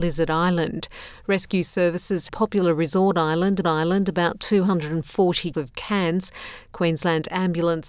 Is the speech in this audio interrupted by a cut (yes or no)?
yes